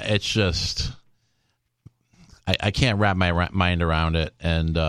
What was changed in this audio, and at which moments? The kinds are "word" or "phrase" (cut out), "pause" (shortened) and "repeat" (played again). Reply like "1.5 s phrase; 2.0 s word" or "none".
none